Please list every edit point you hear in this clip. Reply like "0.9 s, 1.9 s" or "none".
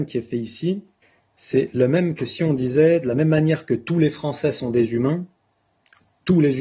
1.0 s